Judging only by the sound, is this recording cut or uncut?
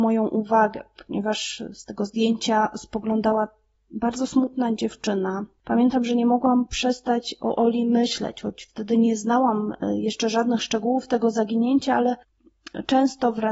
uncut